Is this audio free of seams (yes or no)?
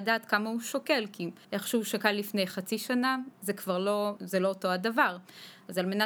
no